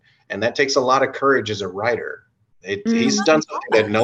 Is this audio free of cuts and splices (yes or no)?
no